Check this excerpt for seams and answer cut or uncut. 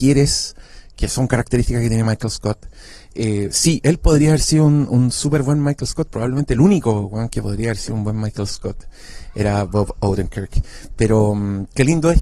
uncut